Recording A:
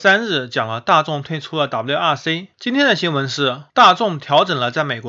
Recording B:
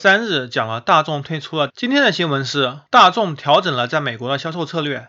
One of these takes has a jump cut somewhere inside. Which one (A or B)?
B